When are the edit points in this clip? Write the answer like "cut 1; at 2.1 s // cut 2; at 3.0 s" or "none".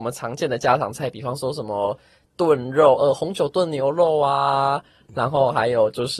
none